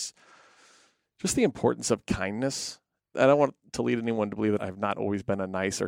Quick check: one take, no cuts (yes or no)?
yes